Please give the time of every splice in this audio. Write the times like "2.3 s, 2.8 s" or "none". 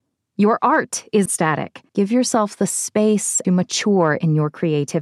1.3 s, 1.9 s, 3.4 s